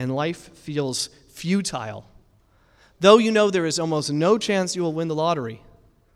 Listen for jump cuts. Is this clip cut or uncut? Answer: uncut